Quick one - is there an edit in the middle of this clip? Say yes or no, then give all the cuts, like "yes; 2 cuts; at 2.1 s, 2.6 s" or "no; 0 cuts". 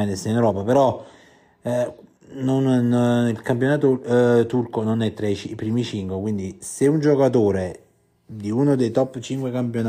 no; 0 cuts